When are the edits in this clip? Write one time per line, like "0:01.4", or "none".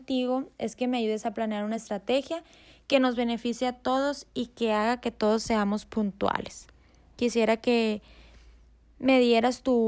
none